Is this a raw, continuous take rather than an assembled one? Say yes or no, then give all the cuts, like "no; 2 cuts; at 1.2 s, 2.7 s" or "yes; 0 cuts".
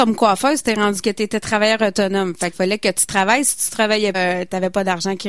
no; 3 cuts; at 1.0 s, 2.5 s, 4.1 s